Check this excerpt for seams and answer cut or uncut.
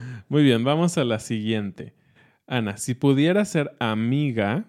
uncut